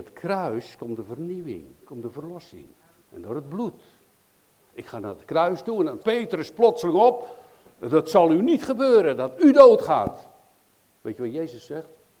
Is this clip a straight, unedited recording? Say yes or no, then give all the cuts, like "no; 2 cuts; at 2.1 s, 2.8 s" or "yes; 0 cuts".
no; 2 cuts; at 3.0 s, 6.0 s